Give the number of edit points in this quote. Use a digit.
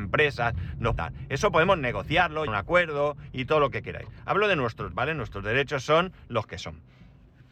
3